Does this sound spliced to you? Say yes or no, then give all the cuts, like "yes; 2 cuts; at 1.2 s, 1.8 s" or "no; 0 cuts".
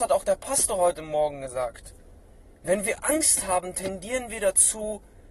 no; 0 cuts